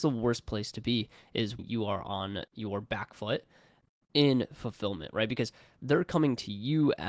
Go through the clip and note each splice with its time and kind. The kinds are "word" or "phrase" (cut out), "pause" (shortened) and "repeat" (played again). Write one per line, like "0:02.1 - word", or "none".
0:01.6 - word